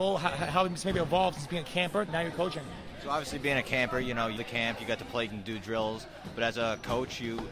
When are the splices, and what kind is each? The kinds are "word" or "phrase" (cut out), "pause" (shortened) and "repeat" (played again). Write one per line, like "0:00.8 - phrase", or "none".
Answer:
0:02.1 - phrase
0:04.4 - word
0:05.3 - word